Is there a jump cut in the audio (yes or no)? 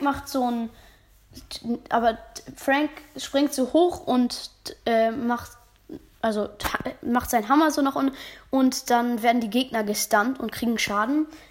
no